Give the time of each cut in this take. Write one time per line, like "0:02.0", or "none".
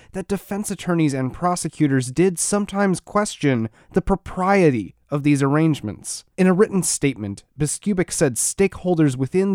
0:06.3